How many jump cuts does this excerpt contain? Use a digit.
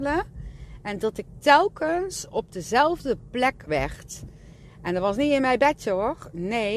1